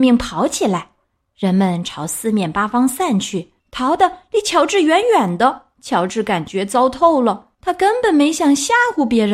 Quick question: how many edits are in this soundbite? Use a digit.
4